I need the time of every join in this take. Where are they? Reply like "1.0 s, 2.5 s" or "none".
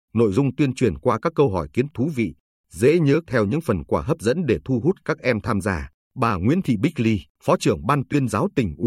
1.9 s, 3.3 s, 6.0 s, 7.3 s